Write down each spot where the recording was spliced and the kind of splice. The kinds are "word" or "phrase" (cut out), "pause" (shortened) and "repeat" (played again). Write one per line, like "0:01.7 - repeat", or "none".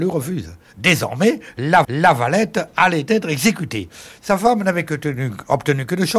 0:01.8 - repeat